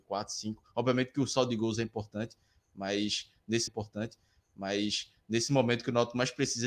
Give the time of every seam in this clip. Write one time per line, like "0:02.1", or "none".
0:03.7